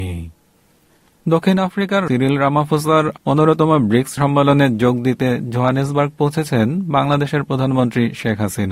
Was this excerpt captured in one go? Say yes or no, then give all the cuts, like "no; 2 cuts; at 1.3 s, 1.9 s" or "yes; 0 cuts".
no; 4 cuts; at 1.1 s, 2.1 s, 3.2 s, 4.2 s